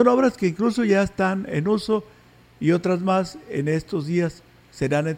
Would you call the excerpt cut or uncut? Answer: uncut